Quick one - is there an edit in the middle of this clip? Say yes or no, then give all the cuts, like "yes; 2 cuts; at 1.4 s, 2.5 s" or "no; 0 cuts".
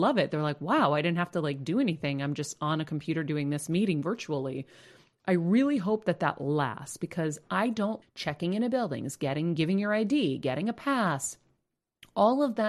yes; 1 cut; at 8.0 s